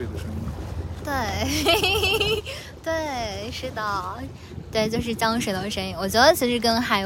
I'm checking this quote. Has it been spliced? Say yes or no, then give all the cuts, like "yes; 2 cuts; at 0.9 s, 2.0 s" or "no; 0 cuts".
no; 0 cuts